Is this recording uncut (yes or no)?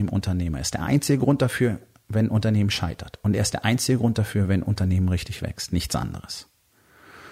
yes